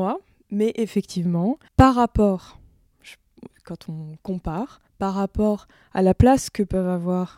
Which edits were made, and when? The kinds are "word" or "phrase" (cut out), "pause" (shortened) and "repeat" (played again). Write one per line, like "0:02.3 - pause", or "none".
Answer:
0:01.7 - pause
0:02.9 - pause
0:04.9 - pause